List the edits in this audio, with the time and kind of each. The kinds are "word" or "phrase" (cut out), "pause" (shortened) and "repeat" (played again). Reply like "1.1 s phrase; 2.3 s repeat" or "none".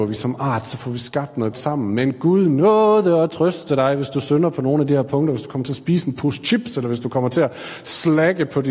1.5 s word